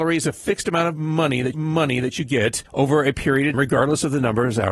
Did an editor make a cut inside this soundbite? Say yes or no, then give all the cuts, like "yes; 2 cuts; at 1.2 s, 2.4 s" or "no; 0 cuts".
yes; 3 cuts; at 1.5 s, 2.7 s, 3.5 s